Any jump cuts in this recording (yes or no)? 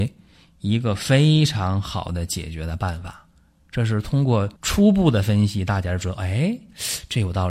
yes